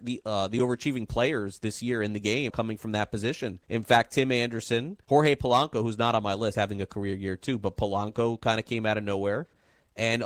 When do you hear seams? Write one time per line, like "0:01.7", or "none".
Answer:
0:02.5
0:03.6
0:05.0
0:06.5